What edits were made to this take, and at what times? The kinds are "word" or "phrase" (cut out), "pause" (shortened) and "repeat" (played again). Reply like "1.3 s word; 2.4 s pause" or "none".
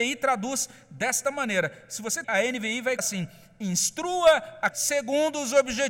2.2 s word; 3.0 s word; 4.7 s word

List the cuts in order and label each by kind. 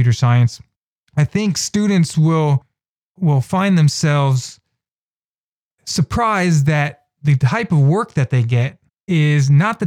none

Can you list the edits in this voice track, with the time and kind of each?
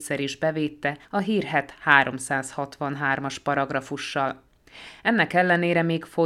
1.0 s pause

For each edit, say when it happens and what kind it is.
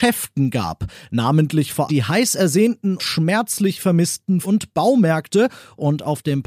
1.9 s word; 3.0 s word; 4.4 s word

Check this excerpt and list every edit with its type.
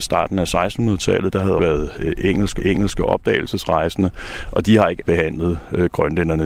1.6 s word; 2.6 s repeat; 5.0 s word

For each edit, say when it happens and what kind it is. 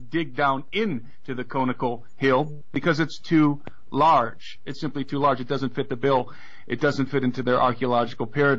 none

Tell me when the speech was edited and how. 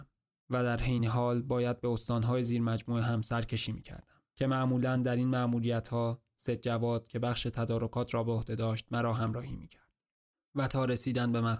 none

